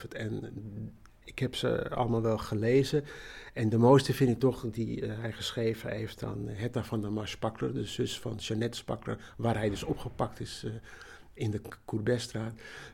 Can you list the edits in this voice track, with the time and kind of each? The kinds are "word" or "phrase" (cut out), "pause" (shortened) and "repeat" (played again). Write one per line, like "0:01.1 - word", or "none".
none